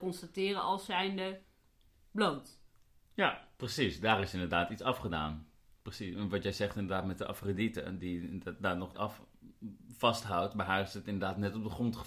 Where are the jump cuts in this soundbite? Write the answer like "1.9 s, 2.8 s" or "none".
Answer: 8.9 s

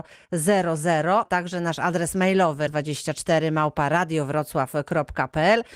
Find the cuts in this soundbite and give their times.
1.3 s, 2.7 s

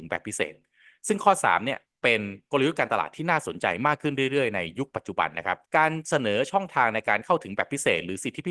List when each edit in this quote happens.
5.7 s

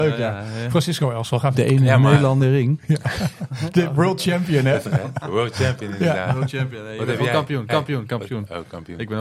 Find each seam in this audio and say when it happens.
1.5 s, 2.4 s, 4.8 s, 7.7 s

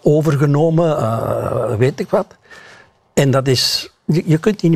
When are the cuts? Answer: none

